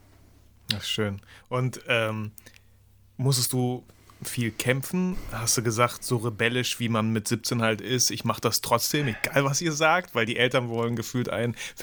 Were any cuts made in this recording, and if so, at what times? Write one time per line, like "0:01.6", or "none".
none